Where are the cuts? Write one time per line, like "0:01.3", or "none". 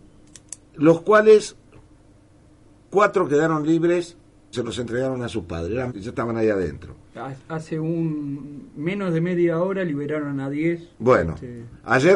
0:04.5
0:05.9